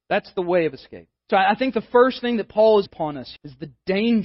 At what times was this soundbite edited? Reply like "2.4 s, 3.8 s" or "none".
1.2 s, 2.9 s, 3.4 s